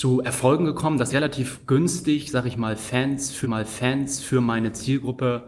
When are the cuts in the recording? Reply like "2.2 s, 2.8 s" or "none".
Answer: 1.1 s, 3.4 s